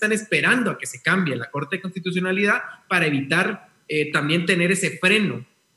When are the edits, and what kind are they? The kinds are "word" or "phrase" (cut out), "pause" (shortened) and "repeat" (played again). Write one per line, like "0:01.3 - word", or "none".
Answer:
none

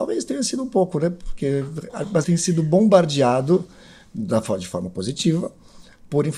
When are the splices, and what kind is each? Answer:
0:02.2 - phrase

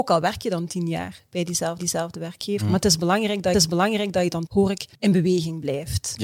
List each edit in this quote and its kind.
0:01.8 - repeat
0:03.5 - repeat
0:04.5 - word
0:04.9 - pause

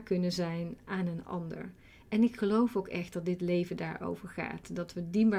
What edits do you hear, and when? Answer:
none

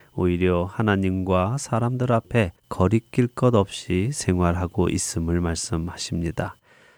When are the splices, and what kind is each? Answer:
0:02.6 - pause

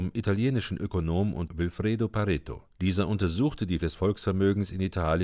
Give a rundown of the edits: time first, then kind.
0:01.5 - word
0:02.7 - pause
0:03.8 - word

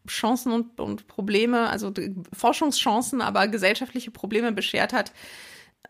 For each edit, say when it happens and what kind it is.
none

